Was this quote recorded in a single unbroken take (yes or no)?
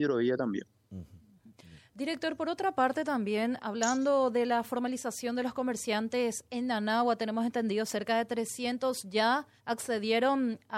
no